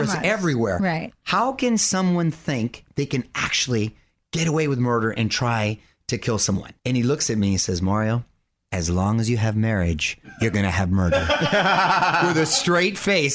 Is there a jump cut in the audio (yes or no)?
yes